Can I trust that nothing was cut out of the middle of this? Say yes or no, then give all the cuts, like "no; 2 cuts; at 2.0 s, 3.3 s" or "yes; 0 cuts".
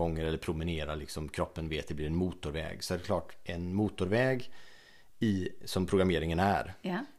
yes; 0 cuts